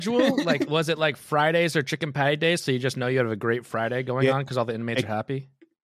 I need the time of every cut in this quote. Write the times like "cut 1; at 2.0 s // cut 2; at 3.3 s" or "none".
none